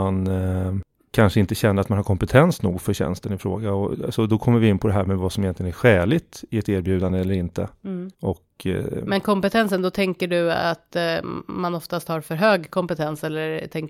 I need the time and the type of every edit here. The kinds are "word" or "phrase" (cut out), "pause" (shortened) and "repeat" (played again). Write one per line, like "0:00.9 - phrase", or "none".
0:08.1 - pause